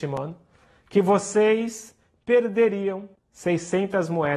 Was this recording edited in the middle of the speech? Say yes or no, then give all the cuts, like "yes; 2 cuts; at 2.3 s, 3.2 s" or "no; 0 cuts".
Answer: yes; 1 cut; at 3.2 s